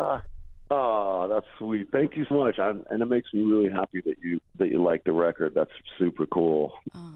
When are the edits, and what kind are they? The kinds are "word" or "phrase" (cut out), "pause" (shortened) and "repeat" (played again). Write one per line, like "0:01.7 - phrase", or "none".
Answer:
0:02.3 - word